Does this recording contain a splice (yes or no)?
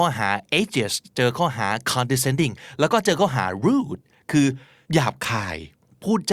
no